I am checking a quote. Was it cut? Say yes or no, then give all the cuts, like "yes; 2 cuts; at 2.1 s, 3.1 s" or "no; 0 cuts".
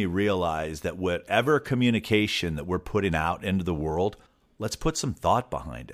yes; 1 cut; at 4.3 s